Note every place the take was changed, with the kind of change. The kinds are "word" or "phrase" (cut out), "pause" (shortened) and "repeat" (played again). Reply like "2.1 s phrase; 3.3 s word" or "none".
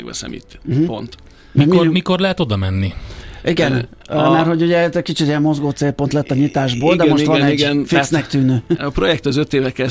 none